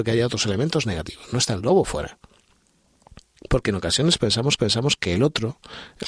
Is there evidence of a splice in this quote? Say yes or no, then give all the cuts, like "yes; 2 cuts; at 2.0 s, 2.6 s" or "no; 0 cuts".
yes; 1 cut; at 4.6 s